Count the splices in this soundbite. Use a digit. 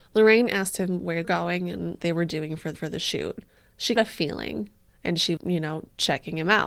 6